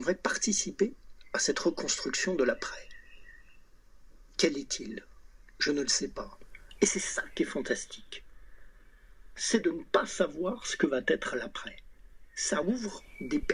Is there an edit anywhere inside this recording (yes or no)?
no